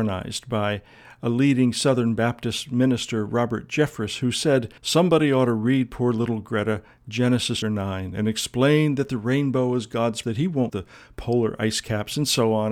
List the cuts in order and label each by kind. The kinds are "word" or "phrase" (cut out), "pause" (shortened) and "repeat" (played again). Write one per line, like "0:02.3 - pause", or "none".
0:04.8 - pause
0:07.6 - word
0:10.2 - word
0:10.7 - word